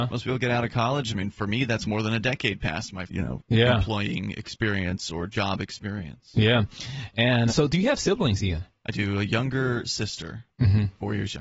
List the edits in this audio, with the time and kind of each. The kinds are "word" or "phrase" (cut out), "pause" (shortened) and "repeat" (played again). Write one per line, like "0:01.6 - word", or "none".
0:03.1 - word
0:07.5 - word